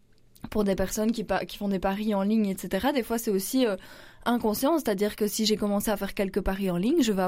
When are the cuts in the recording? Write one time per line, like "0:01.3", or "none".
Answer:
none

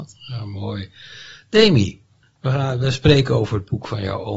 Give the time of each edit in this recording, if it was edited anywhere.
none

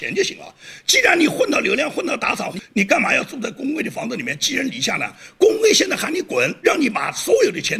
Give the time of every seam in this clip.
0:02.5
0:06.6

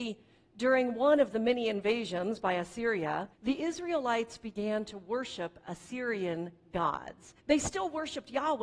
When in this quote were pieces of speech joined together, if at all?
0:03.3
0:07.4

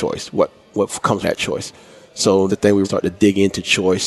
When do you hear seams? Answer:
0:01.2
0:02.5
0:02.8

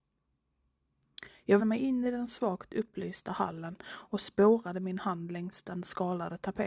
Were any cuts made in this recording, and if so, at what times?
0:01.6

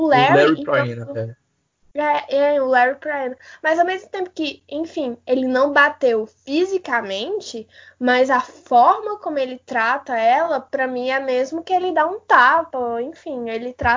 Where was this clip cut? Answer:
none

